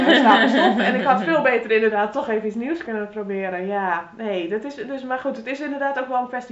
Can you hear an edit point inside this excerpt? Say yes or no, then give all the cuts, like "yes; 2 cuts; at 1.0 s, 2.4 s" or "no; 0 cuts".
yes; 1 cut; at 2.8 s